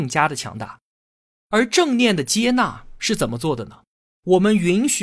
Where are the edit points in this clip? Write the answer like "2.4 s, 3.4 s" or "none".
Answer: none